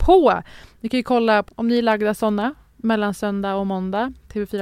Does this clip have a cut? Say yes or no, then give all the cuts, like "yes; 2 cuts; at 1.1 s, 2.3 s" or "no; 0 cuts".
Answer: yes; 1 cut; at 1.5 s